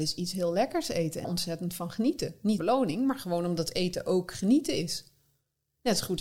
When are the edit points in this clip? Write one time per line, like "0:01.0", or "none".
0:01.2
0:02.6

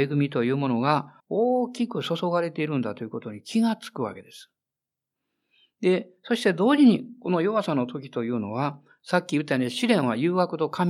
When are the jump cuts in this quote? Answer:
0:01.2

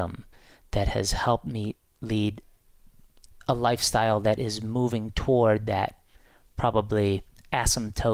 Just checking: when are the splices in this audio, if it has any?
none

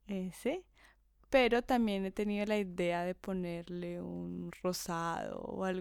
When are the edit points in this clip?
none

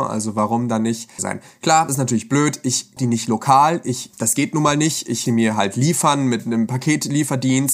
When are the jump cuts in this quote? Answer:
0:01.2
0:01.9
0:03.0
0:04.1
0:05.3

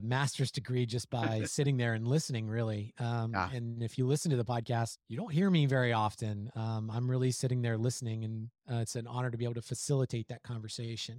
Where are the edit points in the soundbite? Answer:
0:05.0
0:08.6

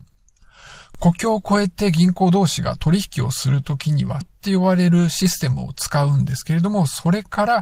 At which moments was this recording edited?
0:04.2

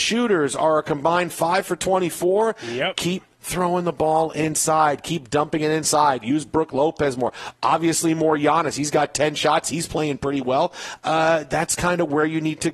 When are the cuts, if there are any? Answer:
none

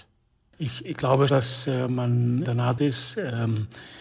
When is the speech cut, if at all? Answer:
0:01.3
0:02.4
0:02.8

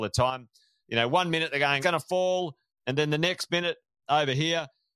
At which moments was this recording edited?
0:01.8
0:04.0

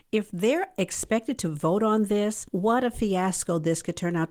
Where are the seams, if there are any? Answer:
0:02.5

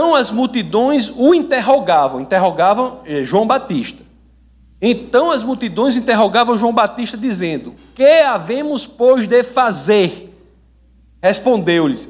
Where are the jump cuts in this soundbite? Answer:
none

